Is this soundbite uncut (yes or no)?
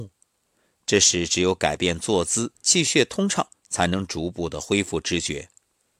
no